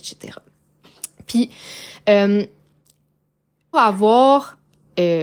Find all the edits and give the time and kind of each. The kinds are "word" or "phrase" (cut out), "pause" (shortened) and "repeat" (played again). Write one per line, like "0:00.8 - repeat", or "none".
0:03.7 - word